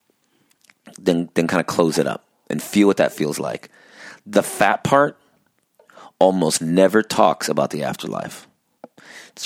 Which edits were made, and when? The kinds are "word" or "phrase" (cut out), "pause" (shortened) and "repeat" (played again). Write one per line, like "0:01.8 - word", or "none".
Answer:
none